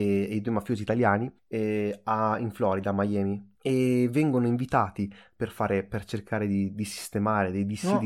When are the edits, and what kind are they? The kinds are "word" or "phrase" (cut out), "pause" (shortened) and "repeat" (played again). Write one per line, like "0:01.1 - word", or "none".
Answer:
0:01.4 - pause
0:03.5 - pause